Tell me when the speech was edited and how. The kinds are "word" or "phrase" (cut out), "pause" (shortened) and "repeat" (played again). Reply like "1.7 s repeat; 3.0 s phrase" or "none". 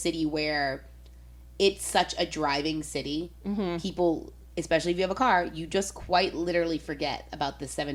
none